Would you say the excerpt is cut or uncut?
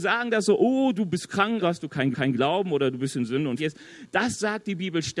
cut